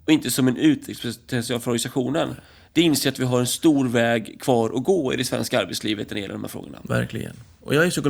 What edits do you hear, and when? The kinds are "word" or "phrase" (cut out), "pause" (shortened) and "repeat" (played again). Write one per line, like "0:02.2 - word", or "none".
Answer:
none